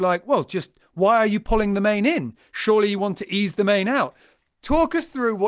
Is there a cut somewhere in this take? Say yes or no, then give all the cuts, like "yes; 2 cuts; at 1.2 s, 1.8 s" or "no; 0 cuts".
no; 0 cuts